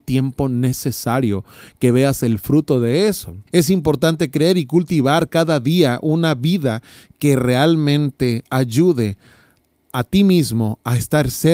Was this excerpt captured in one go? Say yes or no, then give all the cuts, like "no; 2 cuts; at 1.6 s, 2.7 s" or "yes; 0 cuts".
no; 1 cut; at 3.5 s